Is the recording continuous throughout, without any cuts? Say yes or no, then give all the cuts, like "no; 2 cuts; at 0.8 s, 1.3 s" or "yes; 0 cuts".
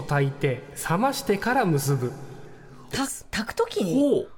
yes; 0 cuts